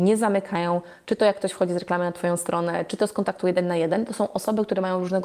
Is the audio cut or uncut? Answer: uncut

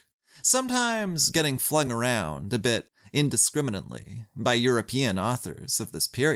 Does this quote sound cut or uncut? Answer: uncut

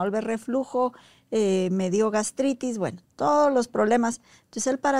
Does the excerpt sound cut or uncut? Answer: uncut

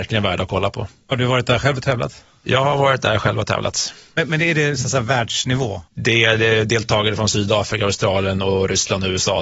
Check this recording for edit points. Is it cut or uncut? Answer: cut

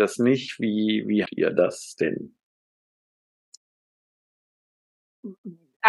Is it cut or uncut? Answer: cut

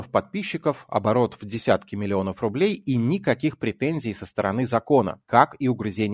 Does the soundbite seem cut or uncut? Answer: cut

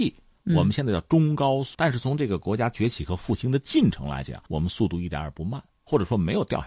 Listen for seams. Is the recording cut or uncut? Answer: cut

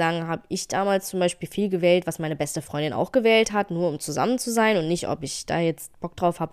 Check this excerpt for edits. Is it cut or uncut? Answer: uncut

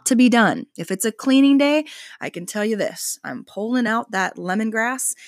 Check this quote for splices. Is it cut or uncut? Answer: uncut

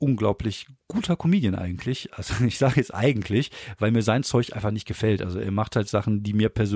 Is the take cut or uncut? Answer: uncut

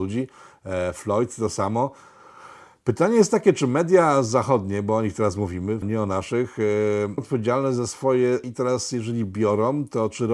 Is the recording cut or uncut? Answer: cut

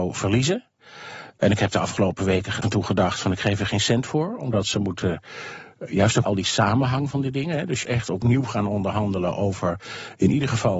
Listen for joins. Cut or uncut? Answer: cut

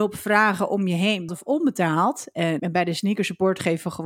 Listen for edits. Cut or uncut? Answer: cut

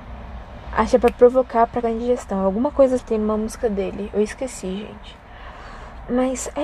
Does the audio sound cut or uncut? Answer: cut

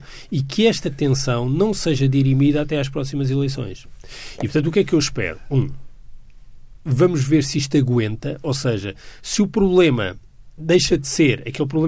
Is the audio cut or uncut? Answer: uncut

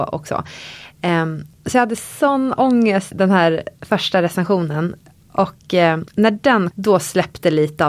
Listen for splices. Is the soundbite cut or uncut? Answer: cut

